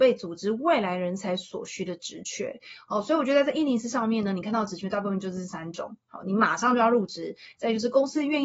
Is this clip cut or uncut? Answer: uncut